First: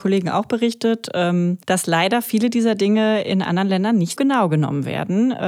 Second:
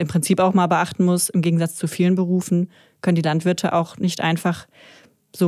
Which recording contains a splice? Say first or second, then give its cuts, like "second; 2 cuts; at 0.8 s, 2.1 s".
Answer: first; 2 cuts; at 1.6 s, 4.2 s